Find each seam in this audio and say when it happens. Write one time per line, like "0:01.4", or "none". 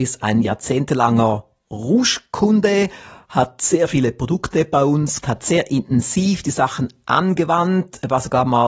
0:05.2